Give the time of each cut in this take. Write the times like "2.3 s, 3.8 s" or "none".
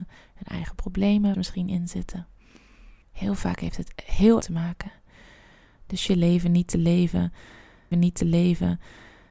1.3 s, 3.0 s, 4.4 s, 6.1 s, 7.9 s